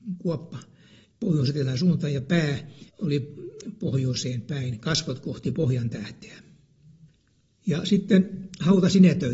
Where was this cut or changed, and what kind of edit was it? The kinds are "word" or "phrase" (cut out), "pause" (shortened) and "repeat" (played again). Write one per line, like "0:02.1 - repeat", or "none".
0:02.9 - pause